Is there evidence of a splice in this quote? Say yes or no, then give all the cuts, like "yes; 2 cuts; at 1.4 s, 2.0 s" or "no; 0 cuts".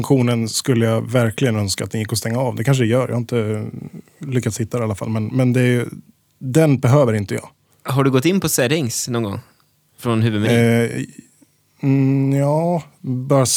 no; 0 cuts